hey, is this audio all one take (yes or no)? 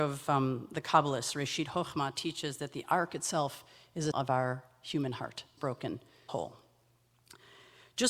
no